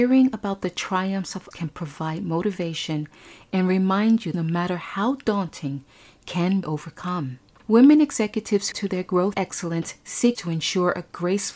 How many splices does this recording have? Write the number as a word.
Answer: six